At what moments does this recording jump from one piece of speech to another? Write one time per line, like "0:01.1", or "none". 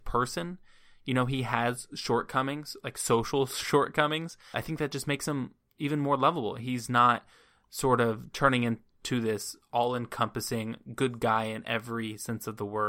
none